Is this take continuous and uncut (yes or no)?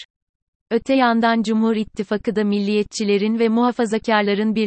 yes